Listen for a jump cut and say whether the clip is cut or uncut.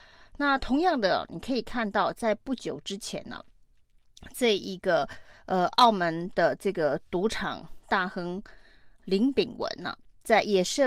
uncut